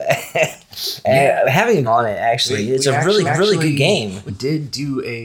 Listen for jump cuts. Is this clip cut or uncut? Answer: cut